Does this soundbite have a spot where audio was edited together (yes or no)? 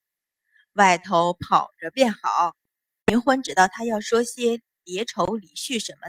no